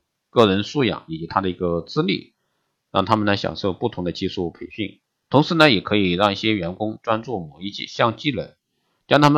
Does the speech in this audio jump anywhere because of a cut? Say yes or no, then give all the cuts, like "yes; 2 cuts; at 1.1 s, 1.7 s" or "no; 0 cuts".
no; 0 cuts